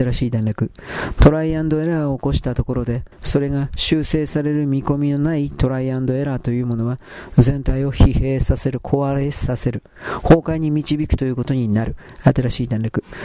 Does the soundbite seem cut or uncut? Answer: cut